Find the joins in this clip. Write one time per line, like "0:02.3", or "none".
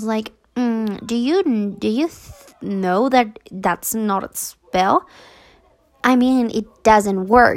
none